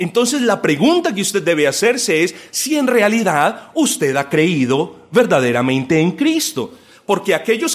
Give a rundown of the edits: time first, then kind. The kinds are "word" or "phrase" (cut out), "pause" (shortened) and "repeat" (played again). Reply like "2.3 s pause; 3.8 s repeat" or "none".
none